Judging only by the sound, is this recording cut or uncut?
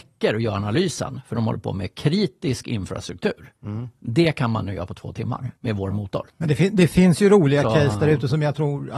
cut